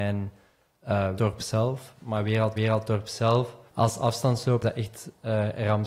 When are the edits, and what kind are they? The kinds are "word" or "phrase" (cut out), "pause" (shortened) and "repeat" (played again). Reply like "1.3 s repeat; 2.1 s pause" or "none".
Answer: 1.2 s phrase; 2.6 s repeat; 3.7 s pause; 4.6 s word